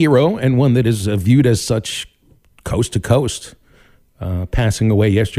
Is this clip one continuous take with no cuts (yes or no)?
yes